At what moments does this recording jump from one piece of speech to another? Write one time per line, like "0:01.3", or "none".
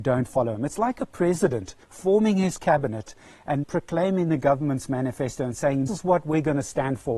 0:01.8
0:03.6
0:05.9

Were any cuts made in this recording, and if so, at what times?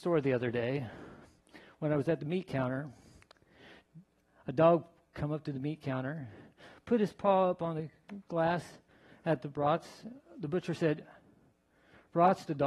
none

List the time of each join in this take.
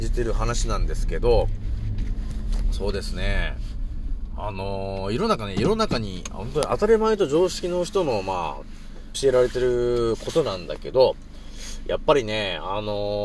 0:09.1

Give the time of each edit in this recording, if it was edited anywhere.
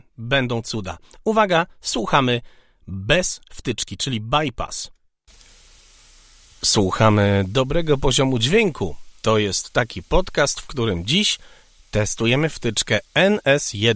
none

